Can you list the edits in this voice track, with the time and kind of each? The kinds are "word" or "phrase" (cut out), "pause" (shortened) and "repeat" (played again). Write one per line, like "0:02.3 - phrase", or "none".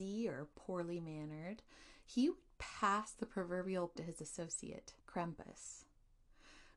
0:04.0 - word
0:05.0 - pause

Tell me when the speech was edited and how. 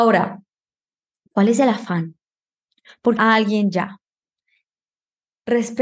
0:03.2 - phrase

